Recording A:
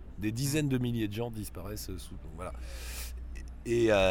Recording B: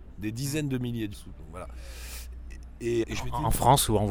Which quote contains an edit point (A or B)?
B